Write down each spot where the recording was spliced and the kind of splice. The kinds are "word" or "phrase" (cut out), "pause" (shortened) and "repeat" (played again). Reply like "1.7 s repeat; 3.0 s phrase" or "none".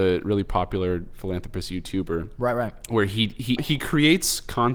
3.6 s word